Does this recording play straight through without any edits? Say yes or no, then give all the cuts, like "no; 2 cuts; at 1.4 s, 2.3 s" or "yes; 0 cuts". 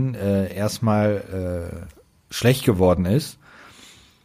yes; 0 cuts